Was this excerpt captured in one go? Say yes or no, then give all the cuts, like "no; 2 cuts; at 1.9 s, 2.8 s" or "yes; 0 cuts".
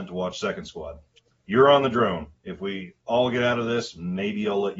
no; 1 cut; at 1.3 s